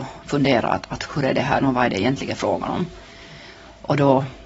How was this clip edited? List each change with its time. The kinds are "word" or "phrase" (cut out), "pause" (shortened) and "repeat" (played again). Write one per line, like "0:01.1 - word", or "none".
0:01.1 - word
0:01.6 - word